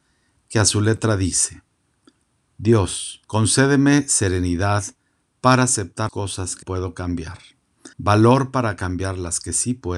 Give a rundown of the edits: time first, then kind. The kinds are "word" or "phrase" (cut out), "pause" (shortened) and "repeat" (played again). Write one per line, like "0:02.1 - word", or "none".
0:03.2 - pause
0:06.1 - word
0:06.6 - word
0:07.9 - pause